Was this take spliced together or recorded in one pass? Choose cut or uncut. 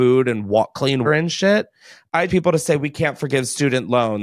cut